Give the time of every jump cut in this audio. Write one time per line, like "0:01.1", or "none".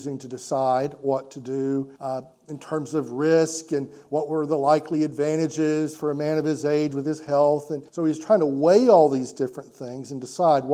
0:02.0
0:07.9